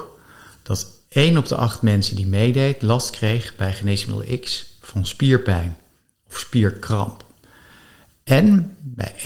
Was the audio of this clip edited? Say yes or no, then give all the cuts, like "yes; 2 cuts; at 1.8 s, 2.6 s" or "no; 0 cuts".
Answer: no; 0 cuts